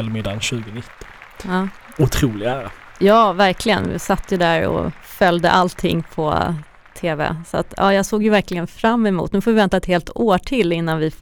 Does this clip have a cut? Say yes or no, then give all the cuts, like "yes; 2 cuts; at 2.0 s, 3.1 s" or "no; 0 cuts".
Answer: no; 0 cuts